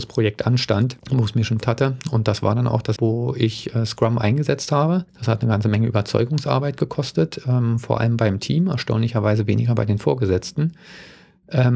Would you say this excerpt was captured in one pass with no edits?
no; 4 cuts; at 1.0 s, 1.6 s, 3.0 s, 5.1 s

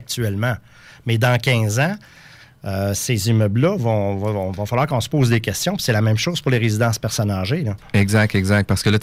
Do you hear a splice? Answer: no; 0 cuts

